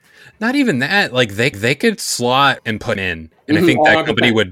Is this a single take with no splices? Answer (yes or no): no